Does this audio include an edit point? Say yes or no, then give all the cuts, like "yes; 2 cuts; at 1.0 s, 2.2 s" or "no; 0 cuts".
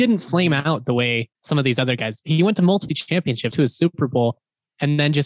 yes; 3 cuts; at 1.3 s, 2.9 s, 3.5 s